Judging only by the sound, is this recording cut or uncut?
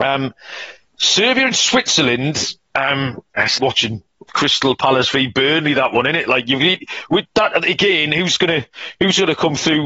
cut